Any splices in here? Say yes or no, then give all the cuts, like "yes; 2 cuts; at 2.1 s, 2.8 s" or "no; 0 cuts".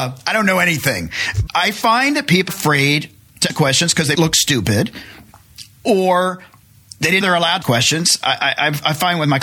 yes; 6 cuts; at 1.5 s, 2.5 s, 3.5 s, 4.1 s, 7.2 s, 7.6 s